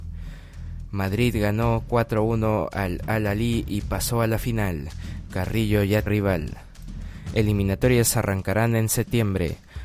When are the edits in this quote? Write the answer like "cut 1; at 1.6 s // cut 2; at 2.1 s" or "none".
cut 1; at 6.1 s